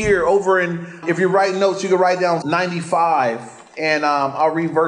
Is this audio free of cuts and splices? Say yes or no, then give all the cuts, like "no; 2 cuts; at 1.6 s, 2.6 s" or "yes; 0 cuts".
no; 2 cuts; at 1.0 s, 2.4 s